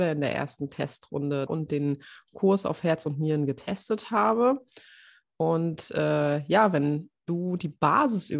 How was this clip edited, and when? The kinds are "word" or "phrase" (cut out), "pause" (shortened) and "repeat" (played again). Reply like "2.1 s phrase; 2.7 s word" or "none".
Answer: 1.5 s phrase